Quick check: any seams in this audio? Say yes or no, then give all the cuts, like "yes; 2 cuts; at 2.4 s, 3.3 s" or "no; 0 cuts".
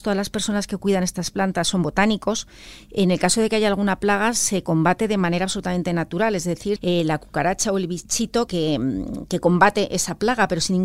yes; 2 cuts; at 6.8 s, 8.5 s